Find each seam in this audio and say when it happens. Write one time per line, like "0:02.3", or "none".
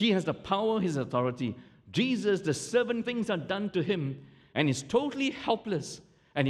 0:03.0